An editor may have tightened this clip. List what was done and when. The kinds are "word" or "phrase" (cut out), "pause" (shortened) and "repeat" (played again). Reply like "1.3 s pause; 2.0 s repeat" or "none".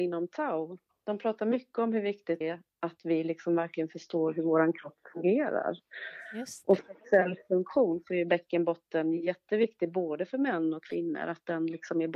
2.4 s word; 6.8 s word

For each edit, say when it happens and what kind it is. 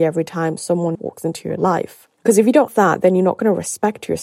0.9 s word; 2.7 s word

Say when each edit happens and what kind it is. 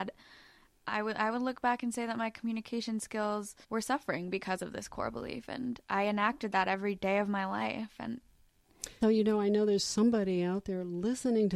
3.6 s pause; 5.8 s pause; 9.0 s word

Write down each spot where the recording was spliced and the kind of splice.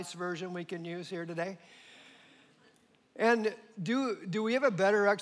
none

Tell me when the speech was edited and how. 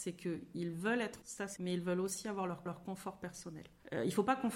1.2 s word; 1.6 s word; 2.7 s repeat

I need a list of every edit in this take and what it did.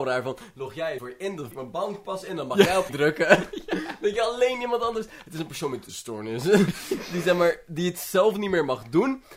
1.0 s word; 1.5 s phrase; 2.9 s word; 5.9 s word

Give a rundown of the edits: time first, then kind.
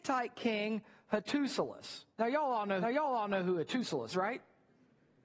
2.1 s pause; 2.8 s repeat; 4.1 s word

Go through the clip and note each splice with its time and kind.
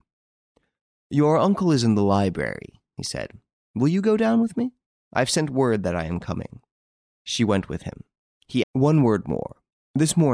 8.6 s word

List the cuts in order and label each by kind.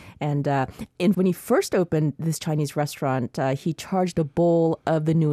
1.1 s word

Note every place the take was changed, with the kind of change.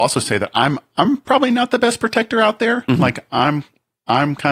none

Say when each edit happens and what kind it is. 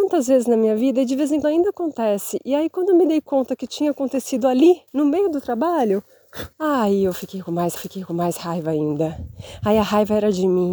1.4 s word; 4.9 s pause; 6.5 s pause; 7.8 s repeat

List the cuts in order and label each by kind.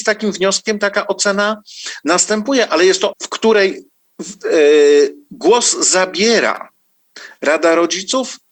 3.1 s word

